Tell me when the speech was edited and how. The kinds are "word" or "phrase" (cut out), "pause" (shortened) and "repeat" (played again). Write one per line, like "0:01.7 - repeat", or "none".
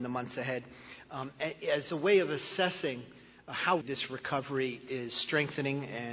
0:03.8 - word